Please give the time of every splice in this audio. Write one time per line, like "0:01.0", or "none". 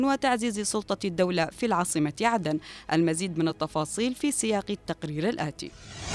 none

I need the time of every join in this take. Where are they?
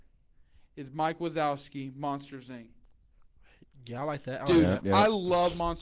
none

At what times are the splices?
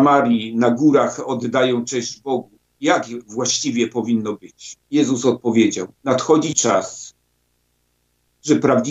0:04.8
0:05.9

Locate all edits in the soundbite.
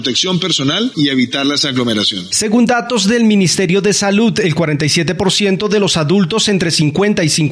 0:00.9

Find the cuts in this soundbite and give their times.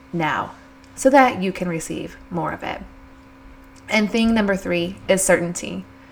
none

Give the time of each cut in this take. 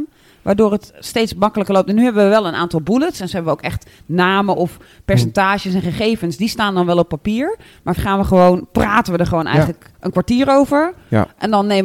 0:03.3
0:08.0

